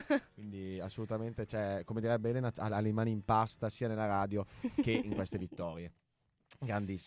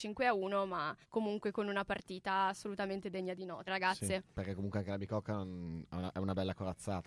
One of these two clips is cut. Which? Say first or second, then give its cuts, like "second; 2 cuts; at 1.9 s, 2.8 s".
second; 3 cuts; at 1.0 s, 3.7 s, 4.3 s